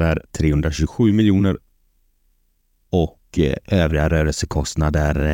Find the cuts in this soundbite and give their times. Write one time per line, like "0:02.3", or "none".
none

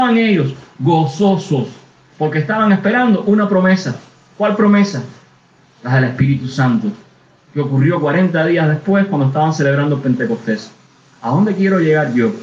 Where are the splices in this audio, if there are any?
none

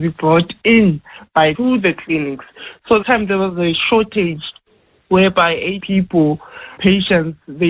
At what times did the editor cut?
0:01.5
0:03.0
0:05.8
0:06.8

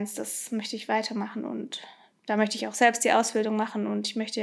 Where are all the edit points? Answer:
none

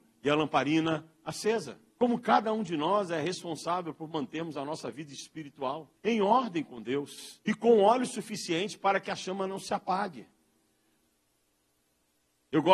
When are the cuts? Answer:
0:01.9
0:06.0
0:07.4

